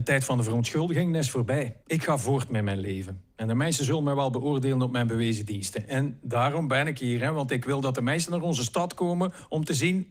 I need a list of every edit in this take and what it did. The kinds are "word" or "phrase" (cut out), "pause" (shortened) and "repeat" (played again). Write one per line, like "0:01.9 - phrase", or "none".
0:01.8 - pause